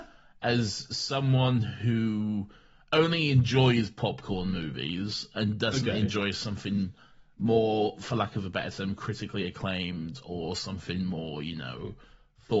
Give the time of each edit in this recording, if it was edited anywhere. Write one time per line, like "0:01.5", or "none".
none